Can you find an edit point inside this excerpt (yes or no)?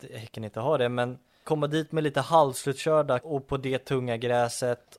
yes